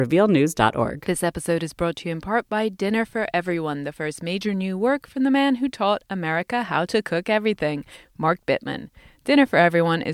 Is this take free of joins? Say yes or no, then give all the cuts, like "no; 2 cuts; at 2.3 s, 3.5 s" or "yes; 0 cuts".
yes; 0 cuts